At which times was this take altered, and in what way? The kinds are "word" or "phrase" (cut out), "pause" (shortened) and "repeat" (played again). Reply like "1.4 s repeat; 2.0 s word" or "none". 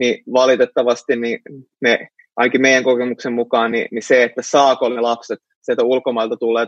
none